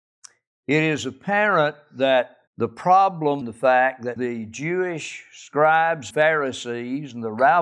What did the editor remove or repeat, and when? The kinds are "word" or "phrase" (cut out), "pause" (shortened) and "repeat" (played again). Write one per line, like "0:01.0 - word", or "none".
0:02.5 - pause
0:03.4 - phrase
0:04.2 - phrase
0:06.1 - word